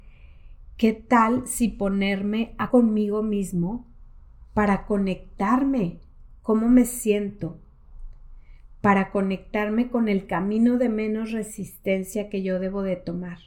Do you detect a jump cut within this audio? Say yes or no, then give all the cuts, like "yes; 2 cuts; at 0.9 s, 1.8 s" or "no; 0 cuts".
yes; 1 cut; at 2.7 s